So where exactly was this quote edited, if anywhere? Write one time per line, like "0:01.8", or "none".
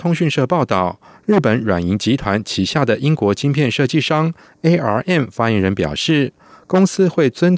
none